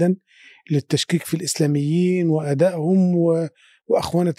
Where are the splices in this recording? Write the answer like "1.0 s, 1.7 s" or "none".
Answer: none